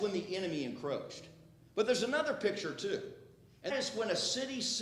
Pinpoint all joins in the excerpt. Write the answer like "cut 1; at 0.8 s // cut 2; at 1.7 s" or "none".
cut 1; at 3.7 s